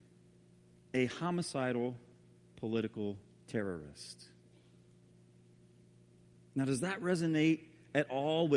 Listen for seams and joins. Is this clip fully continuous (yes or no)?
yes